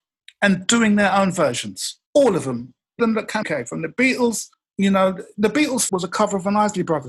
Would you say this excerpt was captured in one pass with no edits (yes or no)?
no